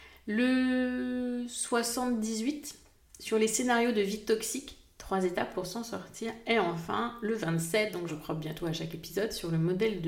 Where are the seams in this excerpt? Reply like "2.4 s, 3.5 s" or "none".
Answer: 8.1 s